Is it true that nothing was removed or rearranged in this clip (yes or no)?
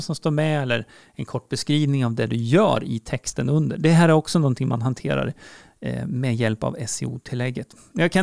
yes